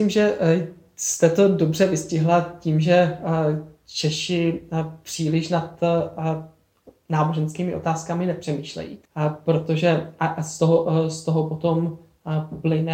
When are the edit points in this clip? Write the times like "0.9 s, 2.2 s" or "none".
9.1 s